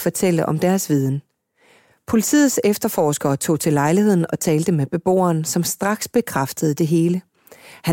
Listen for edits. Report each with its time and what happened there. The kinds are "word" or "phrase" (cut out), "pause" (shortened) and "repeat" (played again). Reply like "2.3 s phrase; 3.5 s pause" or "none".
none